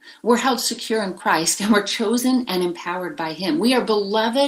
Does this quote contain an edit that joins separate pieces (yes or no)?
no